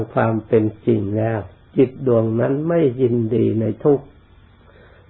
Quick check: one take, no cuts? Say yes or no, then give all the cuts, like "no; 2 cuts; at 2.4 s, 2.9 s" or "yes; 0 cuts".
yes; 0 cuts